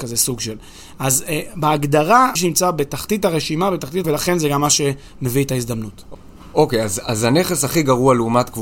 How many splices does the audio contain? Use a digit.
2